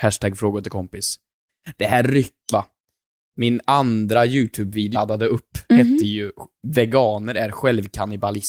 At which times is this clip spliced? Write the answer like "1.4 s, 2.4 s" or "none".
2.5 s, 4.9 s